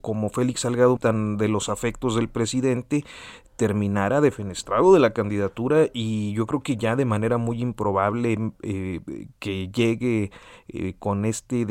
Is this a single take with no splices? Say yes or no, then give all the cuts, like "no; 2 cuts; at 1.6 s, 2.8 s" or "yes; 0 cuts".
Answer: no; 1 cut; at 1.0 s